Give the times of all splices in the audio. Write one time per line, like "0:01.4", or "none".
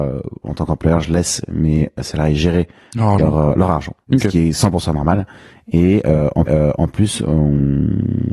0:04.0
0:06.5